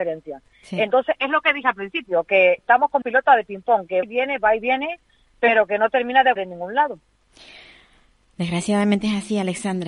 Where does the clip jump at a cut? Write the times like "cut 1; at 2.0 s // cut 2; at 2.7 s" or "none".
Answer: cut 1; at 2.6 s // cut 2; at 3.0 s // cut 3; at 4.0 s // cut 4; at 6.4 s